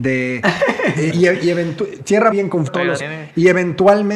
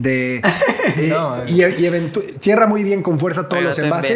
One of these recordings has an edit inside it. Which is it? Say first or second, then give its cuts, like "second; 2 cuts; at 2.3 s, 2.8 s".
first; 4 cuts; at 1.1 s, 2.3 s, 2.7 s, 3.0 s